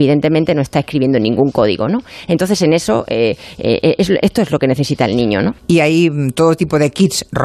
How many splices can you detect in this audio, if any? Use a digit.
1